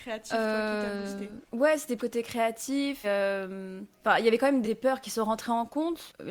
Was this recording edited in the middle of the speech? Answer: yes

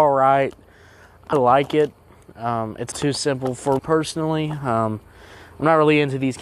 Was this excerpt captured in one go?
no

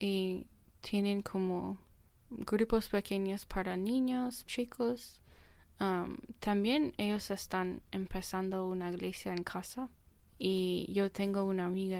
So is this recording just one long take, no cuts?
no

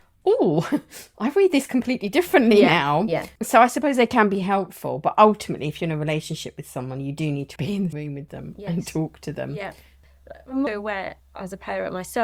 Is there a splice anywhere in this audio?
yes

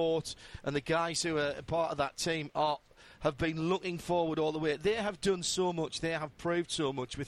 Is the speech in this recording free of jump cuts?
yes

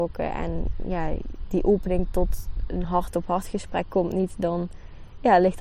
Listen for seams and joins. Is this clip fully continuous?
yes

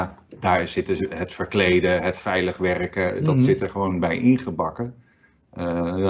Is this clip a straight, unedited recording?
yes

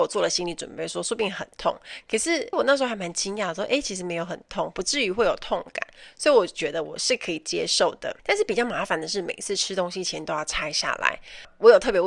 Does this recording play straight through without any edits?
no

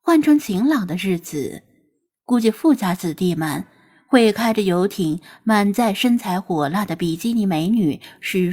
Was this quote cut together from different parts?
no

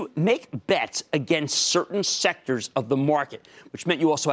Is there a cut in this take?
no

